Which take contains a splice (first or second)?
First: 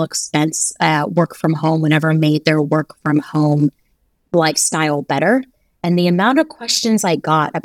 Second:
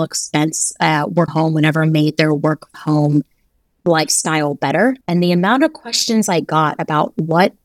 second